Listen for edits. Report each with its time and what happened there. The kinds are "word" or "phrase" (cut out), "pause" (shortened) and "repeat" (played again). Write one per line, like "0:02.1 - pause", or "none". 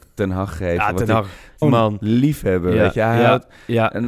0:01.6 - phrase